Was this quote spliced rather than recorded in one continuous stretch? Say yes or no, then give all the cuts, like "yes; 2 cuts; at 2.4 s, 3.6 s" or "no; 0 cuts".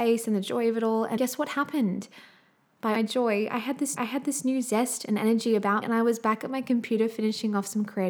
yes; 4 cuts; at 1.2 s, 3.0 s, 4.0 s, 5.8 s